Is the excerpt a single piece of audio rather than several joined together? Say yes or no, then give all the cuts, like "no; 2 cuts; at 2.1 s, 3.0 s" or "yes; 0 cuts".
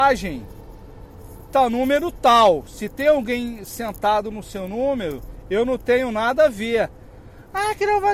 no; 1 cut; at 1.5 s